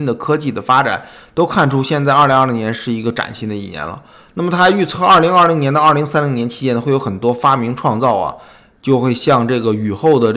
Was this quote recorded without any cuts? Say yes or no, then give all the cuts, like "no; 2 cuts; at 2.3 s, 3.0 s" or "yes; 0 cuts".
yes; 0 cuts